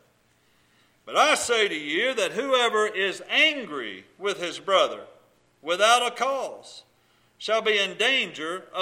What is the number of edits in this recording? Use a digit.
0